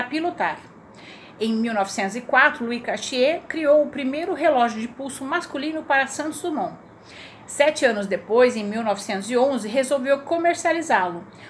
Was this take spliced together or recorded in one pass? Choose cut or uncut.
uncut